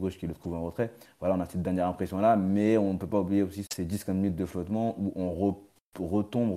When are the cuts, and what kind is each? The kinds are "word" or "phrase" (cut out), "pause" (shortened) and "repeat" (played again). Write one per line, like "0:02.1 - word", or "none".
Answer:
0:03.7 - word